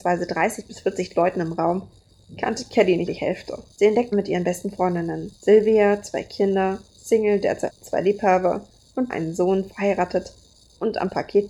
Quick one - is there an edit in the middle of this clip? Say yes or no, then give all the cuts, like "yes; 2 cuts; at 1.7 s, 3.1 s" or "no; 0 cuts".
yes; 7 cuts; at 3.1 s, 3.7 s, 4.1 s, 5.4 s, 6.9 s, 7.7 s, 9.1 s